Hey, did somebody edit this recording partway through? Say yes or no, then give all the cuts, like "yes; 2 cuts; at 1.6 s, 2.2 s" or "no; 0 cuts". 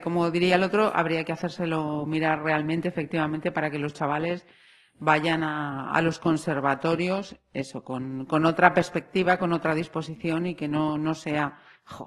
no; 0 cuts